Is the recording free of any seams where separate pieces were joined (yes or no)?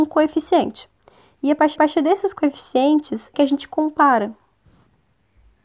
no